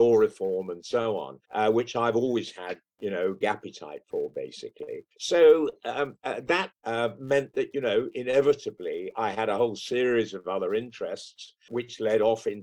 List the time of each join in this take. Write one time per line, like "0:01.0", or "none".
0:01.4
0:03.4
0:05.1
0:06.7